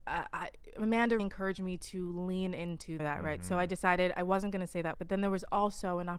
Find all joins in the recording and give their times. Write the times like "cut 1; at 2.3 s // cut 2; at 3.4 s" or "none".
cut 1; at 1.2 s // cut 2; at 3.0 s // cut 3; at 4.9 s

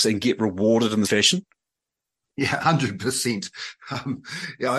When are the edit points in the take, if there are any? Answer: cut 1; at 1.0 s // cut 2; at 2.6 s

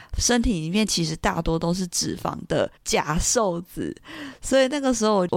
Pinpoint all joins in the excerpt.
cut 1; at 2.8 s

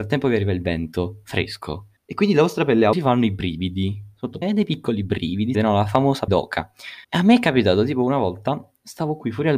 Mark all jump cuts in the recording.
cut 1; at 2.0 s // cut 2; at 2.9 s // cut 3; at 4.4 s // cut 4; at 5.5 s // cut 5; at 6.3 s // cut 6; at 7.0 s

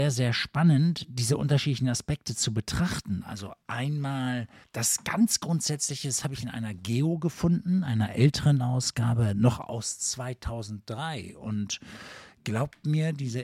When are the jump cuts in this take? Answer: cut 1; at 4.6 s

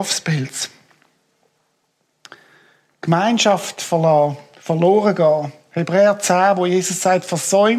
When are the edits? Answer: none

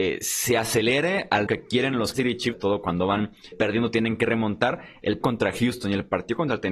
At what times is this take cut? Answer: cut 1; at 1.5 s // cut 2; at 2.1 s // cut 3; at 2.5 s // cut 4; at 3.5 s // cut 5; at 5.2 s

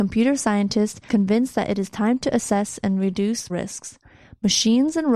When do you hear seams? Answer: cut 1; at 1.1 s // cut 2; at 3.5 s

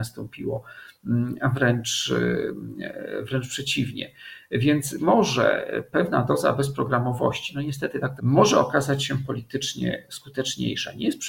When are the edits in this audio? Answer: cut 1; at 5.0 s // cut 2; at 8.2 s

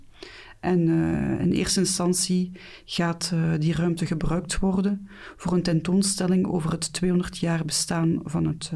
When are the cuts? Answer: none

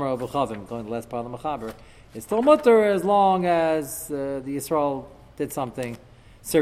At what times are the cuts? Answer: none

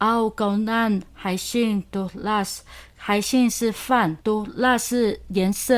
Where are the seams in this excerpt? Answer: cut 1; at 4.2 s

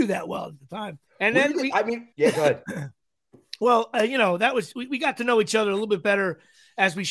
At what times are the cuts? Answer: cut 1; at 1.1 s // cut 2; at 2.1 s

